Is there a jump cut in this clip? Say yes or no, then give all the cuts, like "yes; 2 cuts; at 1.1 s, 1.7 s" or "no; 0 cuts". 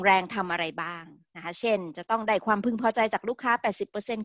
no; 0 cuts